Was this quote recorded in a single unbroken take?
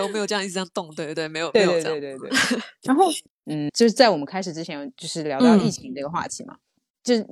no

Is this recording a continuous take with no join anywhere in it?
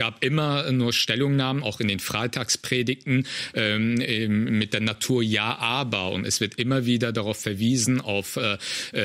yes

